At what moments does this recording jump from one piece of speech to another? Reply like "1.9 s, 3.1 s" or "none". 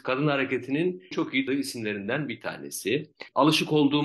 1.1 s, 1.5 s